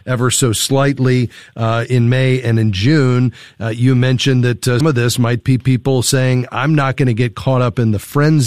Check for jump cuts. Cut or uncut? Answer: cut